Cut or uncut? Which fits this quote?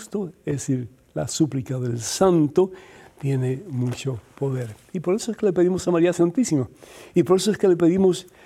uncut